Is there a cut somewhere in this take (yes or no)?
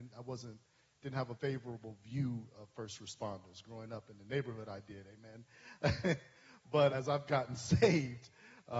yes